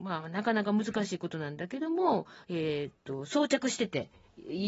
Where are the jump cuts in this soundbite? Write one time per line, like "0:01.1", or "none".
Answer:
none